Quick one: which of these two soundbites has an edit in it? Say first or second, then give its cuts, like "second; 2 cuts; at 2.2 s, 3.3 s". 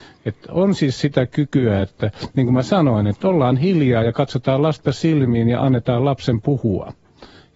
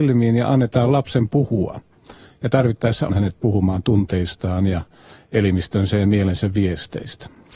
second; 1 cut; at 3.1 s